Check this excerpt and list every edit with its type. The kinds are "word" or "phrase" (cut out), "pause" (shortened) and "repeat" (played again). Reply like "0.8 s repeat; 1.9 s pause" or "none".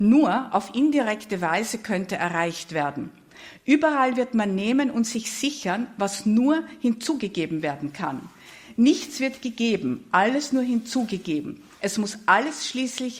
none